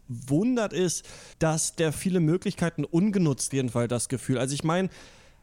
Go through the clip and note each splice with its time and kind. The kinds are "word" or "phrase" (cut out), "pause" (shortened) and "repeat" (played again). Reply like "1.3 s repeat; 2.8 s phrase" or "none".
1.3 s pause; 1.9 s phrase; 3.5 s phrase